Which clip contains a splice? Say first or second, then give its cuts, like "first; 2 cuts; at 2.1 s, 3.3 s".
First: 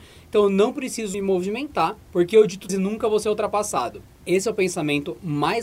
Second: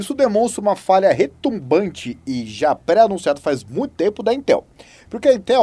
first; 3 cuts; at 1.1 s, 2.0 s, 2.7 s